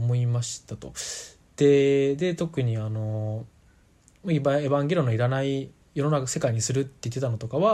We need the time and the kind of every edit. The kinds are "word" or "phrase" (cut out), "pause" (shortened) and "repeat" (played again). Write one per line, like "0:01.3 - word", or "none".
0:05.8 - pause